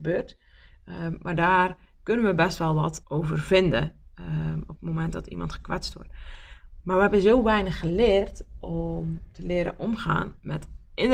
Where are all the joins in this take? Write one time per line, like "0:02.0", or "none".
0:03.0